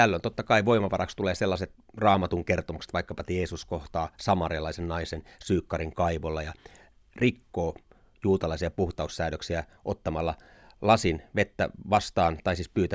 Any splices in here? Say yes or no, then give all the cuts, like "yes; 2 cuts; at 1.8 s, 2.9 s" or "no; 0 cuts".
no; 0 cuts